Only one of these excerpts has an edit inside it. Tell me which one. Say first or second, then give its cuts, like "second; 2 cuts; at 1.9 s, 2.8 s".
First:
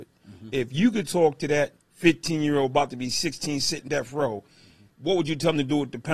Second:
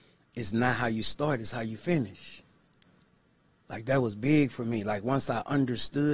first; 3 cuts; at 1.8 s, 3.9 s, 4.9 s